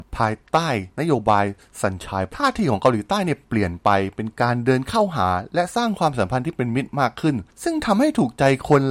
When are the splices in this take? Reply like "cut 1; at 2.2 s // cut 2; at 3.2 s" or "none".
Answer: cut 1; at 2.3 s